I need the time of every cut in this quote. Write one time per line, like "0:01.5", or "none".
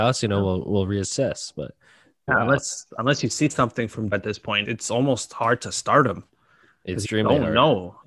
0:02.3
0:04.1
0:04.6
0:07.0